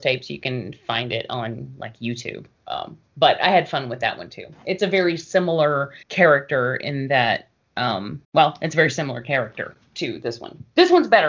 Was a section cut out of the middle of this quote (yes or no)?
yes